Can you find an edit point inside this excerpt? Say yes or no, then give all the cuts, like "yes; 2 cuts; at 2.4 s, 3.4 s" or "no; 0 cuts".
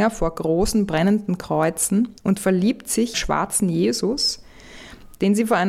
yes; 2 cuts; at 2.2 s, 3.1 s